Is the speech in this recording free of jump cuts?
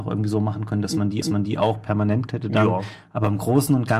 no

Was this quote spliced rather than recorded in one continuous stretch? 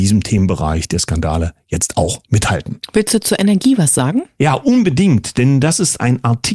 no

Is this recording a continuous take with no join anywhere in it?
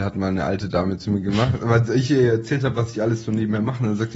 yes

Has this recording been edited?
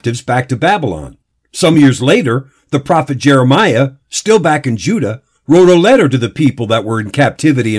no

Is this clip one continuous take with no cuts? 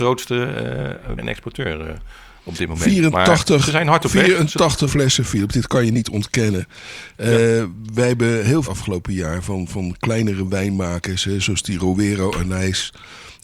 no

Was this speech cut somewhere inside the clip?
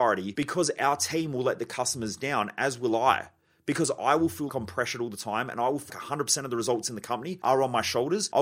yes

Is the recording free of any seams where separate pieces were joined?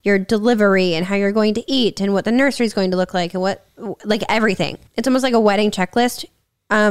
no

